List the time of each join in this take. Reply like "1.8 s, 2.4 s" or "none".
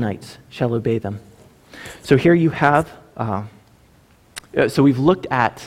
none